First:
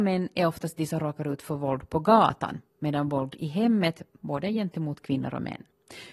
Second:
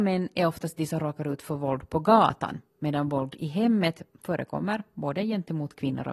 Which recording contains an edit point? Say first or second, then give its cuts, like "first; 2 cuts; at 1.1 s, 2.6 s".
first; 1 cut; at 4.2 s